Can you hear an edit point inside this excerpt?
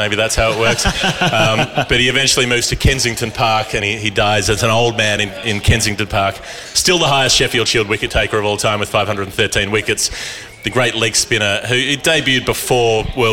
no; 0 cuts

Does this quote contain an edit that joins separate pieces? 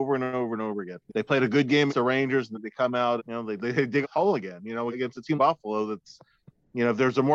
yes; 8 cuts; at 1.1 s, 1.9 s, 2.5 s, 3.2 s, 3.6 s, 4.0 s, 4.9 s, 5.4 s

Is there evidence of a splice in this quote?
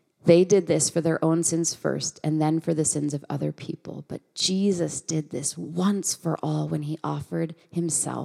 no; 0 cuts

